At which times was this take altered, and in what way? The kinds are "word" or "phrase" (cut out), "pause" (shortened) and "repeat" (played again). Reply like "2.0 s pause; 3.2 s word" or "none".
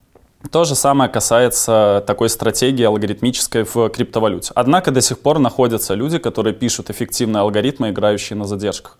none